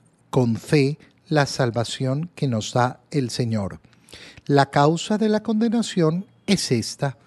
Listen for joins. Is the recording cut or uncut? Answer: uncut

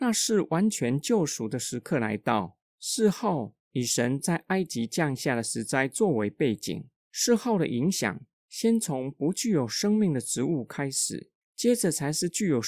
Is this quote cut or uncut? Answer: cut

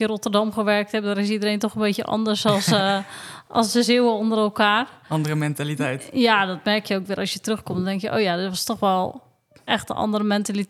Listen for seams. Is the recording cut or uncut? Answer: uncut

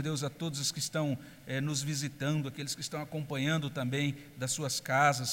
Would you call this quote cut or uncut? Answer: uncut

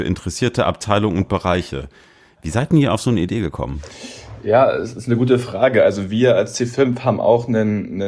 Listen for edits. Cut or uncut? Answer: uncut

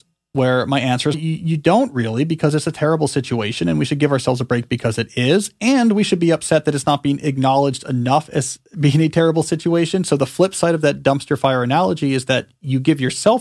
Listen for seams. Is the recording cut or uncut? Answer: cut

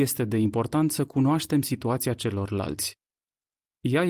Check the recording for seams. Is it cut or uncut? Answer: uncut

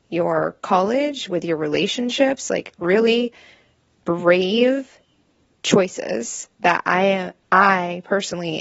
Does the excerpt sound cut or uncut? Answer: uncut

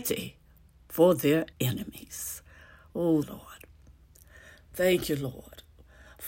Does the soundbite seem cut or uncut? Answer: cut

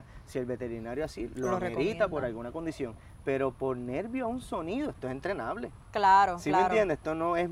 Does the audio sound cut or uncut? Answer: uncut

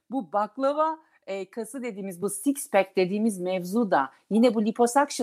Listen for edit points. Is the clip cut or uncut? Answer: uncut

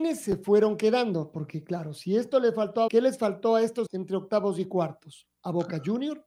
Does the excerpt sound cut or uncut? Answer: cut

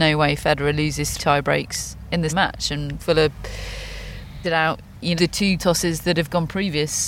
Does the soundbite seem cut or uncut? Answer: cut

